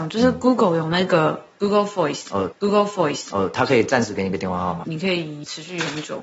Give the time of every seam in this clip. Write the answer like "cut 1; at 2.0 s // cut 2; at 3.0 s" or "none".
cut 1; at 2.5 s

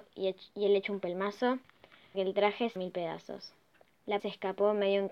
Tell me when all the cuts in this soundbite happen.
cut 1; at 2.1 s // cut 2; at 2.8 s // cut 3; at 4.2 s

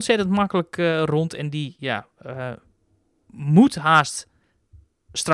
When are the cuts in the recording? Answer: none

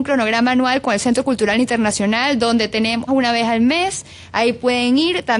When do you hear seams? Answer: cut 1; at 3.1 s

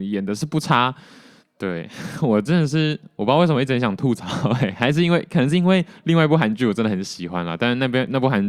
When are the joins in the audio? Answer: cut 1; at 1.4 s

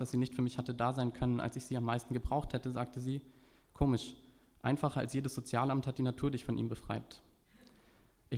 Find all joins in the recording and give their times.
none

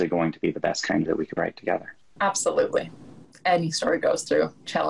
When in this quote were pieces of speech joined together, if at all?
cut 1; at 1.1 s // cut 2; at 1.4 s // cut 3; at 2.2 s

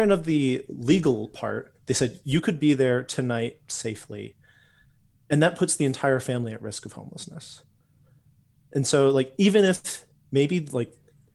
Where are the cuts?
none

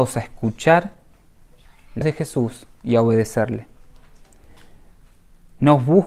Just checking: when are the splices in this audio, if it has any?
cut 1; at 2.0 s

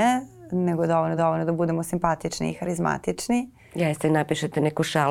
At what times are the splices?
cut 1; at 1.2 s

